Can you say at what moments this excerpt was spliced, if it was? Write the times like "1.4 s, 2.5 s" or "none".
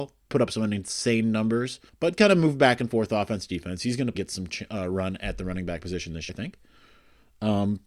1.9 s, 4.1 s, 6.3 s